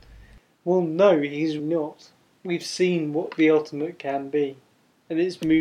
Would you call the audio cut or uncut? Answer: cut